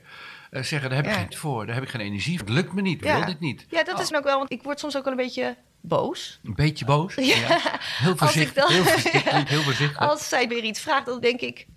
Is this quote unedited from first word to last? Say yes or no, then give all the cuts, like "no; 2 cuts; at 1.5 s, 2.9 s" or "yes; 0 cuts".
no; 6 cuts; at 1.3 s, 2.4 s, 3.0 s, 4.1 s, 4.5 s, 10.5 s